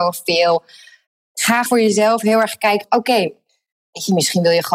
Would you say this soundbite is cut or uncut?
cut